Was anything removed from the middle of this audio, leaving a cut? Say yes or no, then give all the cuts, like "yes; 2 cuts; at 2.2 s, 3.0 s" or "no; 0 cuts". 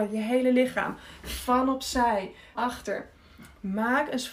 yes; 1 cut; at 2.5 s